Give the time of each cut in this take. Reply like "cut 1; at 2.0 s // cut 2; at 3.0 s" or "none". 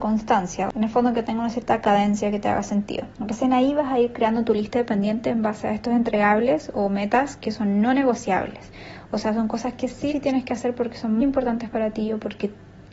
cut 1; at 3.1 s // cut 2; at 10.1 s // cut 3; at 11.2 s